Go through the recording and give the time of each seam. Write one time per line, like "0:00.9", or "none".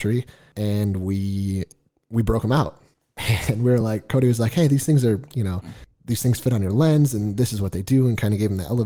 none